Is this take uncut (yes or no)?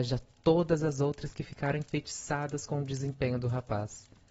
yes